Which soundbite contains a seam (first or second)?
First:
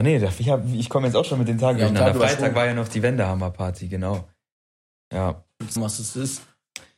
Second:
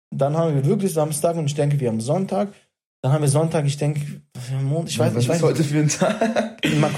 first